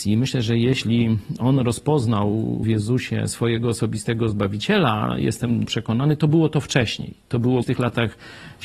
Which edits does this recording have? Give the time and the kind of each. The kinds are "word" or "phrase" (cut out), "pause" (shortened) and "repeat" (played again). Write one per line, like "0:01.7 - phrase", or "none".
0:02.6 - word
0:05.7 - phrase
0:07.6 - word